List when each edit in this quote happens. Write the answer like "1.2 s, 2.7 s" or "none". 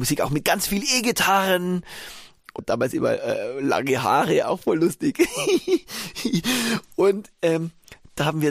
2.6 s